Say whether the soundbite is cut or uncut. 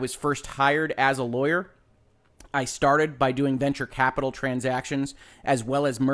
uncut